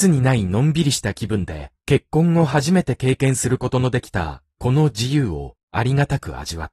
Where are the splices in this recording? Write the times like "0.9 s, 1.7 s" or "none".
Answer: 1.8 s, 5.6 s